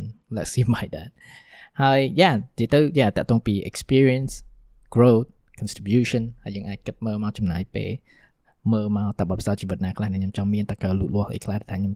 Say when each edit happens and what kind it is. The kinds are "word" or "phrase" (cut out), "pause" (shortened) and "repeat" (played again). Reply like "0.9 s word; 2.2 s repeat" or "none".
none